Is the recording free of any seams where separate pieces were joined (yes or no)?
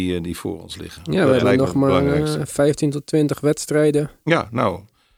yes